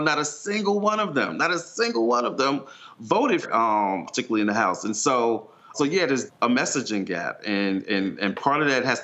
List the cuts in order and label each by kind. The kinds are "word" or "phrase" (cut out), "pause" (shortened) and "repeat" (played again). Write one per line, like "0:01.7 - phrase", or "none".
0:03.4 - word
0:04.1 - word
0:05.7 - word
0:06.3 - word